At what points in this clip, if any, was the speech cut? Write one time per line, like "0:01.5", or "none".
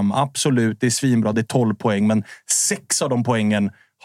none